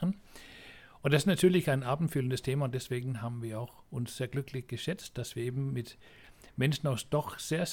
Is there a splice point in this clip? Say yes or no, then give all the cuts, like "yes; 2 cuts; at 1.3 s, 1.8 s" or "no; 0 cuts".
no; 0 cuts